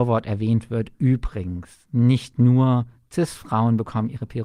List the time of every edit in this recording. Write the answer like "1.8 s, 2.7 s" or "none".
none